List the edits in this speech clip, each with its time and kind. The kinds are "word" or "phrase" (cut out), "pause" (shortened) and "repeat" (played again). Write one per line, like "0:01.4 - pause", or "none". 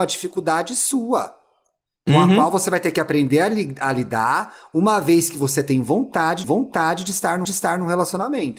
0:06.4 - repeat
0:07.4 - repeat